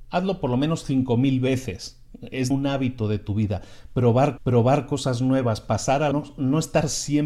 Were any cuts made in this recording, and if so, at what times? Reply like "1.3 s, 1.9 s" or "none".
2.5 s, 4.4 s, 6.1 s